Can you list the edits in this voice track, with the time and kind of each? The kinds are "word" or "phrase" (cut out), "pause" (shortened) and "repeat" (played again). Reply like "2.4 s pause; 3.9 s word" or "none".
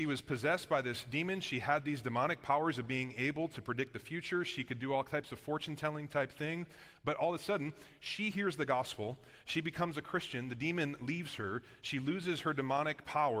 none